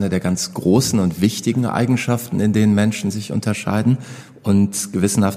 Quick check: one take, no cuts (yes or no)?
yes